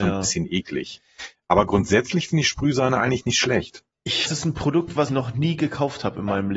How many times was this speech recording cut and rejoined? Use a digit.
2